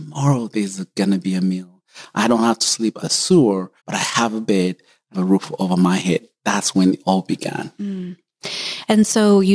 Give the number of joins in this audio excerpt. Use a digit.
3